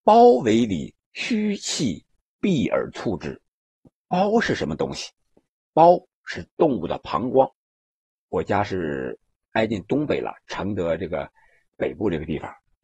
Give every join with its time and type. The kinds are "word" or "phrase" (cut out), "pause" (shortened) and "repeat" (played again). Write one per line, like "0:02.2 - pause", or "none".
0:01.0 - pause